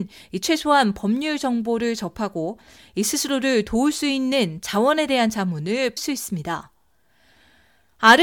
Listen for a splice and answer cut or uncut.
cut